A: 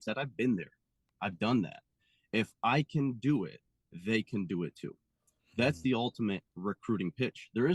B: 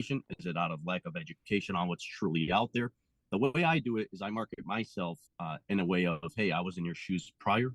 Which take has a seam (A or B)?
B